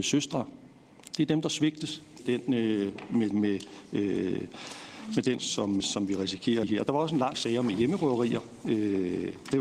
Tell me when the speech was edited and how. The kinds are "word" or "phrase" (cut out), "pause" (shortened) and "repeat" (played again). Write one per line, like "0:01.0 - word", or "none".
0:02.2 - word
0:03.3 - word
0:05.4 - word
0:05.8 - word
0:06.6 - word
0:07.3 - word